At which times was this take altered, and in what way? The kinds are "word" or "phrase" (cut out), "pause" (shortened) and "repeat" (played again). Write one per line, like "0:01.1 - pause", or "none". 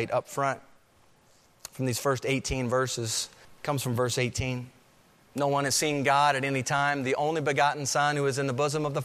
0:03.4 - pause
0:05.0 - pause